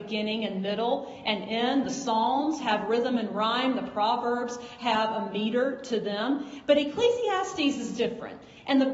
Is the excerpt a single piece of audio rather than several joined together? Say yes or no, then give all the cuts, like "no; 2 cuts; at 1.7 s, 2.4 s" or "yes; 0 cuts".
yes; 0 cuts